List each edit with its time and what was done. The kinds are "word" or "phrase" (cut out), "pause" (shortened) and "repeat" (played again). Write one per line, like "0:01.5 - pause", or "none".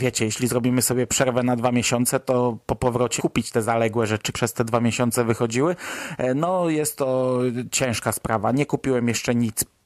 0:03.2 - word
0:04.3 - word